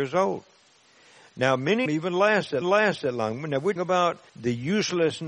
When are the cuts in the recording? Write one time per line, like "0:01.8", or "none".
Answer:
0:01.9
0:02.6
0:03.8
0:04.3